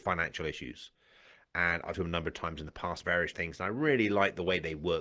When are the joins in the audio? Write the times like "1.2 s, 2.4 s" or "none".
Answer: 1.9 s, 3.0 s, 3.3 s